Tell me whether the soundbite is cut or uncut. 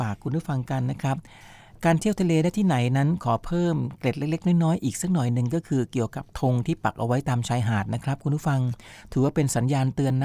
uncut